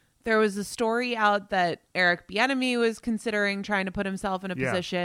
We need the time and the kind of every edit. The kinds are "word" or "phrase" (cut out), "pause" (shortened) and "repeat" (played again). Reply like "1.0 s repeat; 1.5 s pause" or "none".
1.9 s pause